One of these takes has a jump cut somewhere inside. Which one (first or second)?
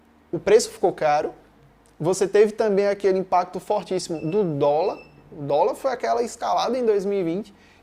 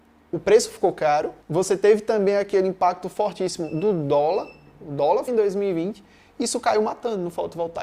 second